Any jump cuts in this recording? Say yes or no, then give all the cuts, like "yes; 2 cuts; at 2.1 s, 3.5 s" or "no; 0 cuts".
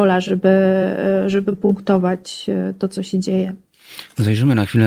no; 0 cuts